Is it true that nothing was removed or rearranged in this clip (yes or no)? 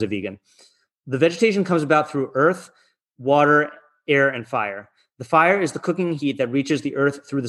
yes